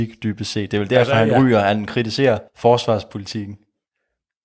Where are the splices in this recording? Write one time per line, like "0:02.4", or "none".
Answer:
0:01.9
0:02.5